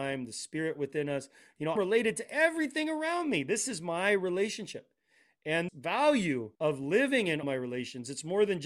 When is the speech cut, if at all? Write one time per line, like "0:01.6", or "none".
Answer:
0:01.8
0:05.7
0:06.6
0:07.4